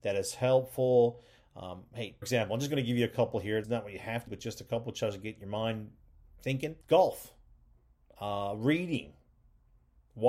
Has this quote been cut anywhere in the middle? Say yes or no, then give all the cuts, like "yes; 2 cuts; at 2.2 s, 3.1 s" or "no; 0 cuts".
yes; 4 cuts; at 2.2 s, 3.6 s, 4.3 s, 6.8 s